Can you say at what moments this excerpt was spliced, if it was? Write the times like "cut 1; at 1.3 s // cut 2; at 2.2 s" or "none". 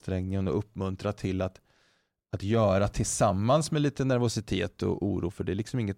none